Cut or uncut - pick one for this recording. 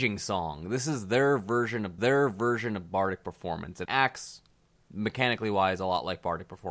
cut